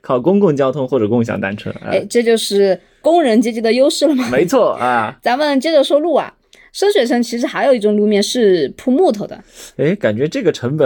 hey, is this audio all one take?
yes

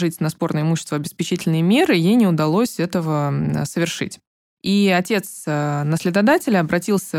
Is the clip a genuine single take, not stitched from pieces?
yes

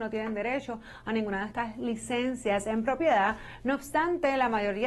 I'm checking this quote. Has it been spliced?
no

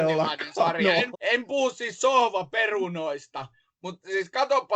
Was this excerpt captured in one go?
no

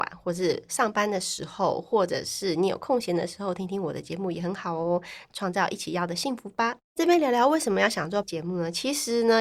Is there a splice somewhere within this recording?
yes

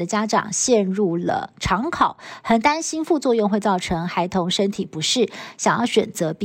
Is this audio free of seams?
yes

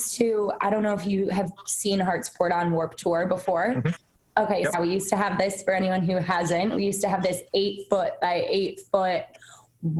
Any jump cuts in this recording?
yes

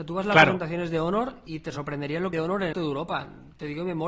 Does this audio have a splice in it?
yes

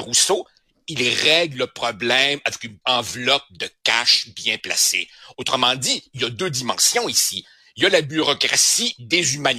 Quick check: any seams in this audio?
yes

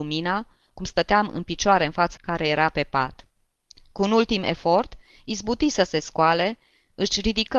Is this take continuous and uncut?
no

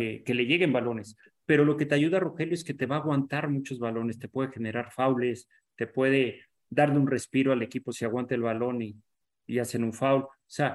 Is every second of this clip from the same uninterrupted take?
yes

